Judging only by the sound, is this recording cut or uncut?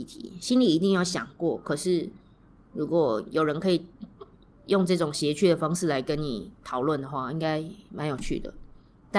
uncut